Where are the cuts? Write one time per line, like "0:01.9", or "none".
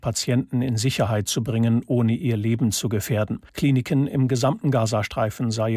0:03.5